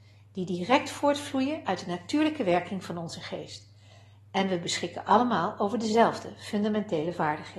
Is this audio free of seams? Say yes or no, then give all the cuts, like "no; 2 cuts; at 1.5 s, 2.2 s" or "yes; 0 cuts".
yes; 0 cuts